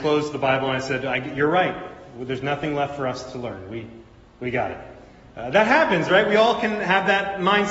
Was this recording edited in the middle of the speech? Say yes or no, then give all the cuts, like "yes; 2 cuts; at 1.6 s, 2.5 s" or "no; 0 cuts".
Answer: no; 0 cuts